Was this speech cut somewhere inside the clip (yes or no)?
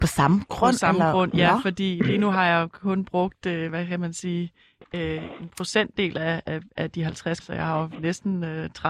yes